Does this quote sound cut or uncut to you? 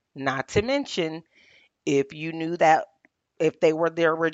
cut